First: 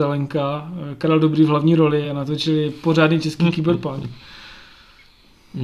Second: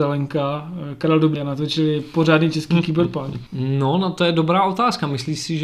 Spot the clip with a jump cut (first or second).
second